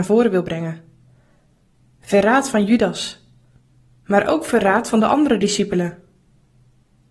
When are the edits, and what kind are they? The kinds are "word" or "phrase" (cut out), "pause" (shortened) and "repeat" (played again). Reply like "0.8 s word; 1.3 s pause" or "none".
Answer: none